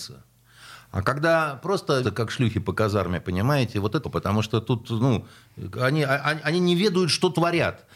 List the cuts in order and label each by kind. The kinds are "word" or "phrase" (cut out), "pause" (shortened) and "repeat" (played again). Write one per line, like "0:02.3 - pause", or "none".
0:02.0 - word
0:04.0 - word